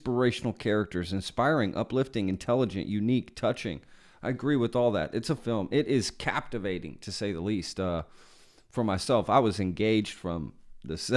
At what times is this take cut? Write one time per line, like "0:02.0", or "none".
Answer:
0:05.4